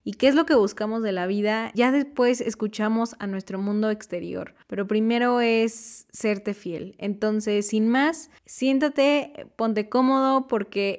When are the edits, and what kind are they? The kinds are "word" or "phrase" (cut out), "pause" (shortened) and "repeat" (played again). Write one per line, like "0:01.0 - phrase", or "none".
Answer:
0:01.7 - word
0:04.6 - pause
0:08.4 - pause